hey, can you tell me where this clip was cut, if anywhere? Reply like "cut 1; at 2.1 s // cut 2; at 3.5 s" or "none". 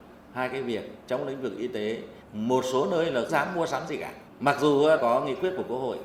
cut 1; at 1.0 s // cut 2; at 2.2 s // cut 3; at 3.3 s // cut 4; at 4.3 s // cut 5; at 5.0 s